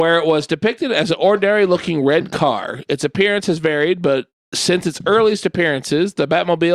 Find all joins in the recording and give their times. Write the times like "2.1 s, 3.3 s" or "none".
4.3 s